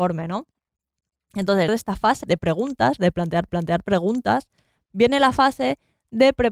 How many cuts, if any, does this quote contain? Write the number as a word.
three